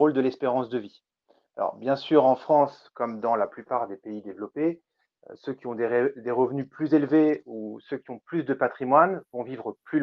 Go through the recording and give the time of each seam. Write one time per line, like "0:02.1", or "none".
none

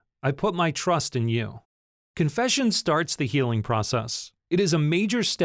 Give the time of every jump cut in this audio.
0:04.4

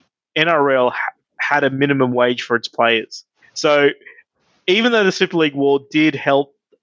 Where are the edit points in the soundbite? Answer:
0:03.4

